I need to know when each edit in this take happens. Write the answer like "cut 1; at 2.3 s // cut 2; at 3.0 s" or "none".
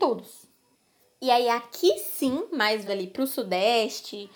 cut 1; at 2.9 s